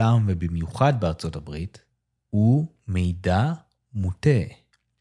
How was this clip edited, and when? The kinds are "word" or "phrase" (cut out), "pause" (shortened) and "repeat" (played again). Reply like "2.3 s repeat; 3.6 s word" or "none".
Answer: none